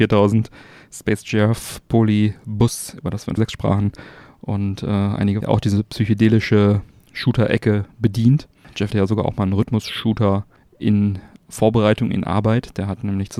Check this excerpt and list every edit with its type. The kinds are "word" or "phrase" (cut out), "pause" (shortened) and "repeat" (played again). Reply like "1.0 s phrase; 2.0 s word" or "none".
3.4 s word; 5.4 s phrase; 8.9 s phrase